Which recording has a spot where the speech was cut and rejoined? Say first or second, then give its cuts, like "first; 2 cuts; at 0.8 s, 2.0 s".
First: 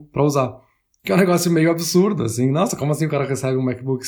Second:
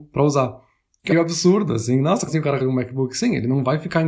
second; 3 cuts; at 1.1 s, 2.3 s, 2.6 s